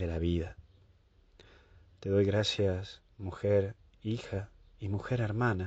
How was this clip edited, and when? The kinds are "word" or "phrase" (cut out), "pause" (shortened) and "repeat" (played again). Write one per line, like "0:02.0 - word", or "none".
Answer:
none